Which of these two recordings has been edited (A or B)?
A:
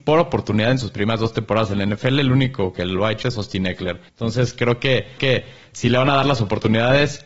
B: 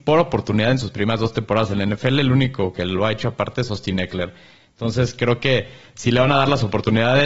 A